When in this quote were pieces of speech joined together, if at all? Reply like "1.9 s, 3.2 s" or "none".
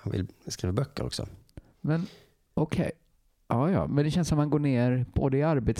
none